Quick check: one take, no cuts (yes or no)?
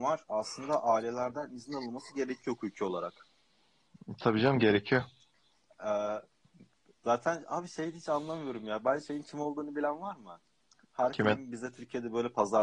yes